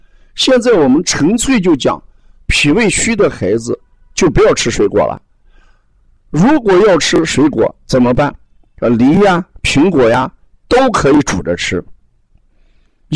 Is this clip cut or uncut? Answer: uncut